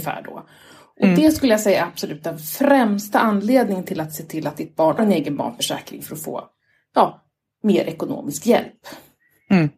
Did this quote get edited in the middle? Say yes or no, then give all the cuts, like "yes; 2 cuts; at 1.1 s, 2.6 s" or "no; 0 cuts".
yes; 1 cut; at 5.0 s